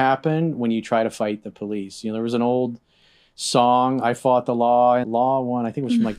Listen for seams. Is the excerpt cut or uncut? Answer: cut